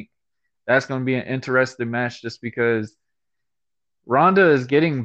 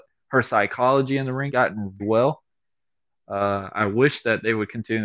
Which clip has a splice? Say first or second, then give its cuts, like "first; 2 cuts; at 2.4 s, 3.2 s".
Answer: second; 2 cuts; at 1.5 s, 2.0 s